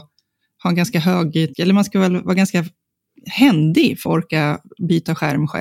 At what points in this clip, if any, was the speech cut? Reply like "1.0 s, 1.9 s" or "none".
1.5 s, 4.0 s